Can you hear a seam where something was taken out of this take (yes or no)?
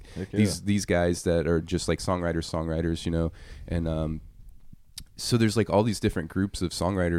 no